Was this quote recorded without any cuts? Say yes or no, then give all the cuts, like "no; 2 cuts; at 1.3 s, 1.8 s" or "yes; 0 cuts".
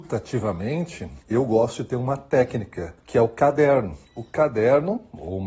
no; 3 cuts; at 1.2 s, 3.0 s, 4.0 s